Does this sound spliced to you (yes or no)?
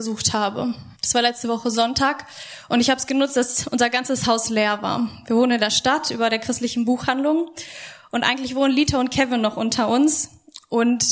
yes